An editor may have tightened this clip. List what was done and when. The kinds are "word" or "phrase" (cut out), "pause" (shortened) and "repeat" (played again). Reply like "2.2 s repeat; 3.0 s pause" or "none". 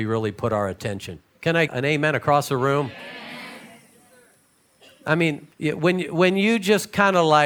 1.3 s pause; 1.7 s word; 5.5 s pause

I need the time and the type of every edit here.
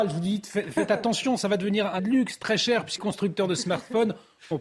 2.0 s word; 3.0 s word

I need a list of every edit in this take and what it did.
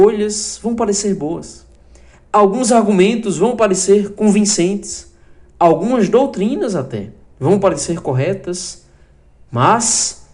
none

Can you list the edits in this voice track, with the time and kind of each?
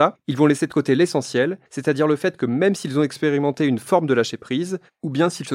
1.7 s pause

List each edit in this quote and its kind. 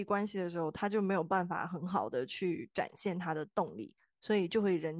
none

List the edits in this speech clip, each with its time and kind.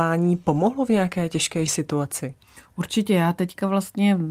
1.7 s word

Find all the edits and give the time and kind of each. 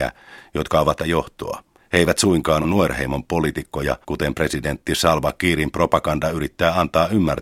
1.0 s phrase; 1.8 s pause; 2.6 s phrase; 4.0 s pause

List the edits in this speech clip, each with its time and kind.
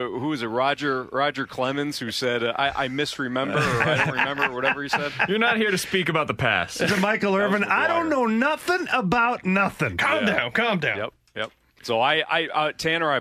11.7 s pause

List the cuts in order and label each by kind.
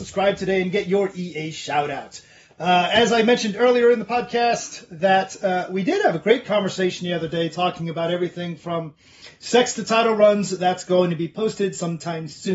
none

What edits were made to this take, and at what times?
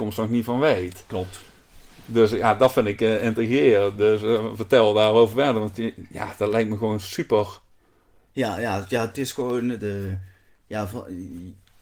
9.8 s word

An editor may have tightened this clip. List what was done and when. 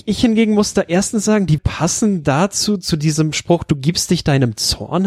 1.6 s word

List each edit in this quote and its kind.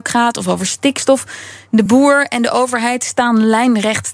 none

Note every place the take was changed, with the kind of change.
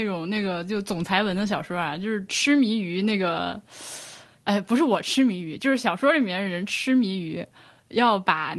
none

